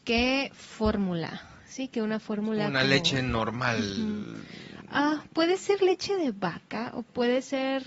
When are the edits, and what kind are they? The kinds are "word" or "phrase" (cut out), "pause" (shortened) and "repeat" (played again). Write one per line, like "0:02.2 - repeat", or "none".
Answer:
none